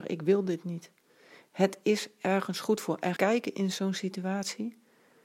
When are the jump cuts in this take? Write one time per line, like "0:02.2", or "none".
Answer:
0:03.2